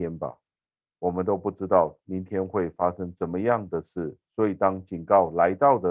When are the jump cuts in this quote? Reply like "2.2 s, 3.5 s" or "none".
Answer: 4.2 s

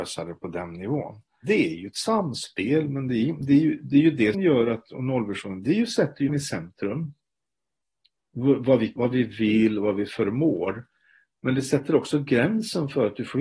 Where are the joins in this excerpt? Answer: 4.3 s, 6.3 s, 9.0 s

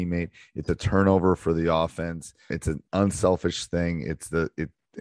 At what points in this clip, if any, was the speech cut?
2.5 s

